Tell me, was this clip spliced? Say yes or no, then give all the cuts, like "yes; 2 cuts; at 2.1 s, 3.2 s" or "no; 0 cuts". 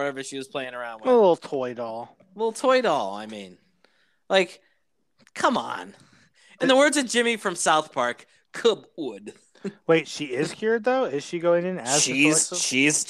no; 0 cuts